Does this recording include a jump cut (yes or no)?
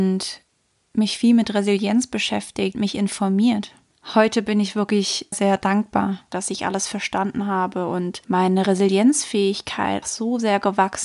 yes